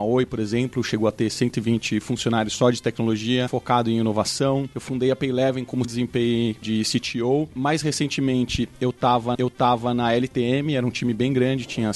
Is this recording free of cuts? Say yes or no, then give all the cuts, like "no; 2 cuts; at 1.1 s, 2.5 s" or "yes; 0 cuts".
no; 4 cuts; at 3.5 s, 5.8 s, 6.6 s, 9.3 s